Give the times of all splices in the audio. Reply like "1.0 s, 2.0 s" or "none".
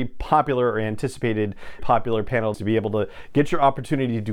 1.8 s, 2.5 s